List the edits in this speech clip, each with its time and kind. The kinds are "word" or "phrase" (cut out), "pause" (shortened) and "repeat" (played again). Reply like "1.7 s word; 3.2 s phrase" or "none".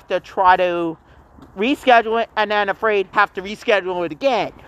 3.1 s phrase